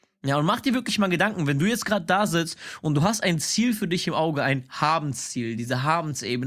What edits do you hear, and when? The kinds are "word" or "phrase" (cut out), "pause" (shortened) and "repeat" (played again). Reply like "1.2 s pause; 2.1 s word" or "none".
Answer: none